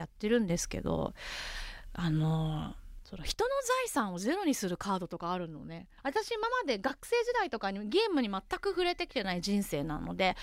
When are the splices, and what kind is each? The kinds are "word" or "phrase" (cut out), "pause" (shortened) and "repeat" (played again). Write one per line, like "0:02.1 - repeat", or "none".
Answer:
0:06.0 - pause

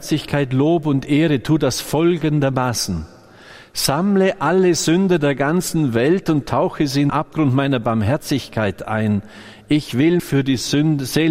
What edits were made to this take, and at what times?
0:07.1 - word
0:10.2 - word

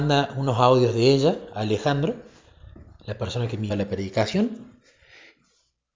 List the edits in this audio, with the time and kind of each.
0:03.7 - word

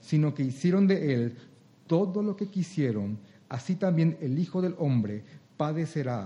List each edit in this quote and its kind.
none

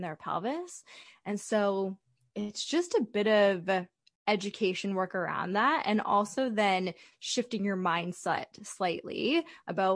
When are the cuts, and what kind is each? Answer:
none

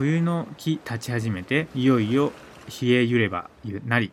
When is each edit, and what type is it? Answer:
0:01.7 - pause

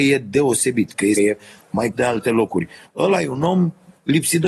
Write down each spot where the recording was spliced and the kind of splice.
0:01.1 - phrase
0:01.9 - word

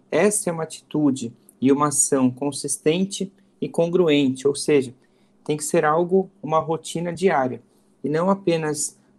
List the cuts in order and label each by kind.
none

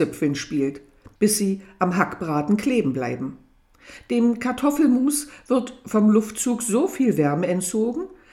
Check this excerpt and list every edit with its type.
0:01.2 - pause

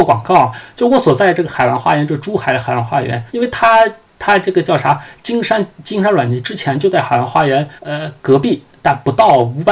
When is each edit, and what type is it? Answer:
0:03.3 - pause
0:07.8 - pause

